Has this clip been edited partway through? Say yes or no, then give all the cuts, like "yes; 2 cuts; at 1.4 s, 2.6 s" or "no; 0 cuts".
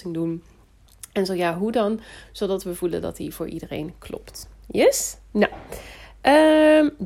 no; 0 cuts